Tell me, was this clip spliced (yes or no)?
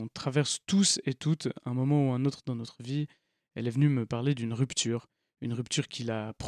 no